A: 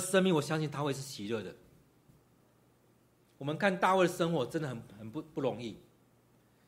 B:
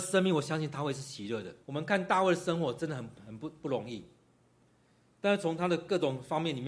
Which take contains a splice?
B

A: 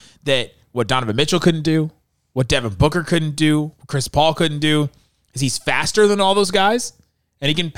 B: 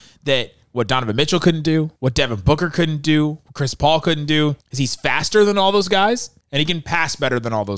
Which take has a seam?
B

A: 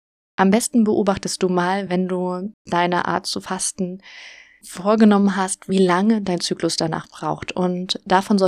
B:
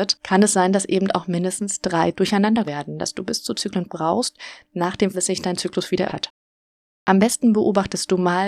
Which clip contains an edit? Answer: B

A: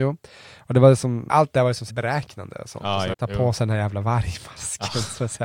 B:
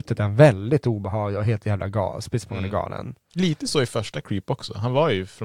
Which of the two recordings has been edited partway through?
A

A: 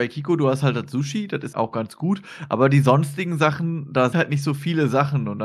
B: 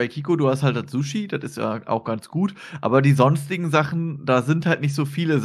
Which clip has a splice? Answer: A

